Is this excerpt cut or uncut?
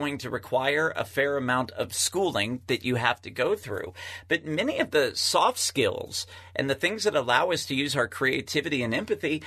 uncut